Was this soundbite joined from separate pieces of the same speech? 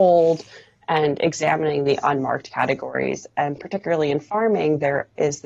no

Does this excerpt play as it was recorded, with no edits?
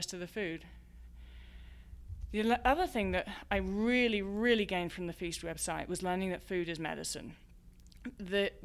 yes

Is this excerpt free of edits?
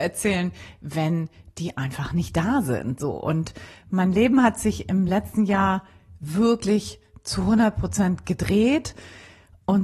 yes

